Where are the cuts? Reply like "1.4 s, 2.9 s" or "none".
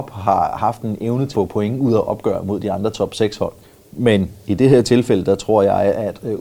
1.3 s, 3.6 s